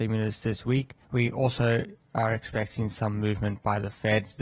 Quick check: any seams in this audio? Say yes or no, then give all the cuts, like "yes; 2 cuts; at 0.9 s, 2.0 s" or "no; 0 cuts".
yes; 1 cut; at 1.0 s